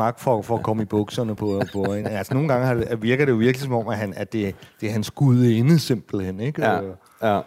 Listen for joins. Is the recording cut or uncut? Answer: uncut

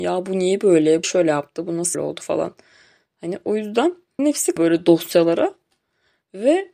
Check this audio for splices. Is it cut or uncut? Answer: cut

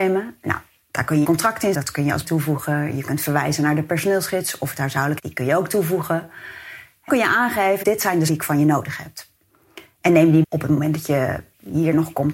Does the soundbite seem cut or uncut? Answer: cut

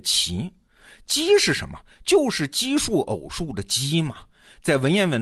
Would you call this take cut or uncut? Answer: uncut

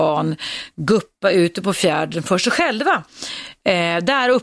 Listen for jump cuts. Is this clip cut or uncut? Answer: uncut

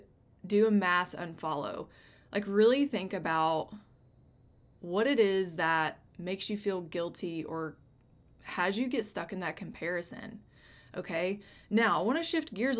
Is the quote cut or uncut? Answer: uncut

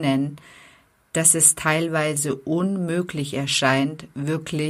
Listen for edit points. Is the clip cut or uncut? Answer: uncut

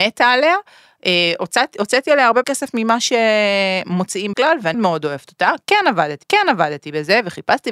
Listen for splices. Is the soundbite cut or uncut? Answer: cut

